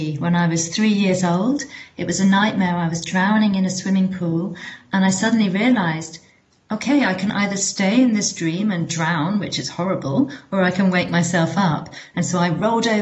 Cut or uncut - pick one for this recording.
uncut